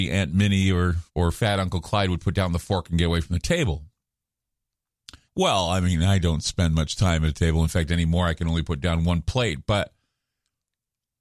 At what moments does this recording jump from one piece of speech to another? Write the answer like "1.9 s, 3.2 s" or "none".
1.1 s, 5.3 s